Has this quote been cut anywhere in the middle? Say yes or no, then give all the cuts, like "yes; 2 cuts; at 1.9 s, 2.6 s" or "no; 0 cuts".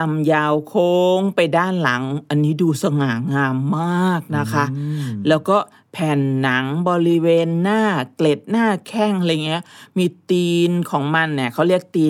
no; 0 cuts